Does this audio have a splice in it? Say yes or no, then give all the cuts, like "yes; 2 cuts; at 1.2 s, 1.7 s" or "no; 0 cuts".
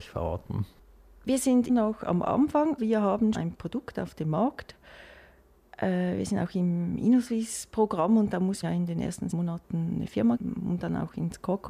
yes; 6 cuts; at 1.7 s, 2.8 s, 3.3 s, 8.6 s, 9.3 s, 10.4 s